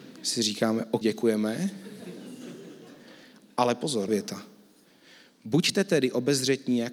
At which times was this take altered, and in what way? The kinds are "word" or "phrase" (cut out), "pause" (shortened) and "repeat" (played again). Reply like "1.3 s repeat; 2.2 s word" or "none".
1.0 s word; 4.1 s word